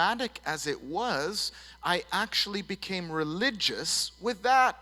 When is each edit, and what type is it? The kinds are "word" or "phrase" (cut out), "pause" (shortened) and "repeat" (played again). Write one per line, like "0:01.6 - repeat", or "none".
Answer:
none